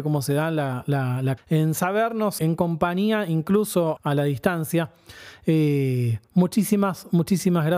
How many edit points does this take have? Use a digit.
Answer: 3